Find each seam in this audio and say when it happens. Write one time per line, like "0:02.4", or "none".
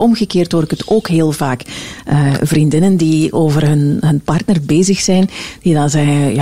none